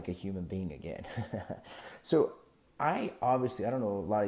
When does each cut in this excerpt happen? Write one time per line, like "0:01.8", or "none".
none